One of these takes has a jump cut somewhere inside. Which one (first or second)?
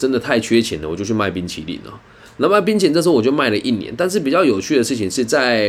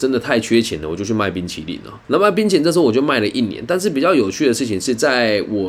second